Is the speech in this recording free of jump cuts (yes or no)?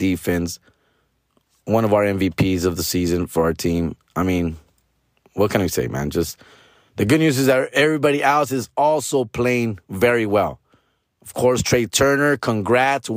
yes